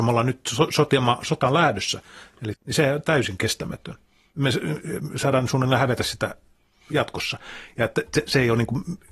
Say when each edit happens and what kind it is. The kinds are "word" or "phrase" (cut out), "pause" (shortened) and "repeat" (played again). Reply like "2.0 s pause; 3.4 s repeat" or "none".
2.5 s word

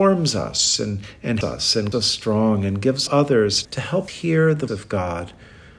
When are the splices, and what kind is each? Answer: 1.4 s word; 1.9 s word; 3.1 s word; 3.6 s word; 4.1 s word; 4.7 s word

